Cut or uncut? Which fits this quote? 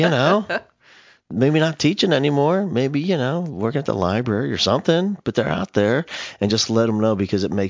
uncut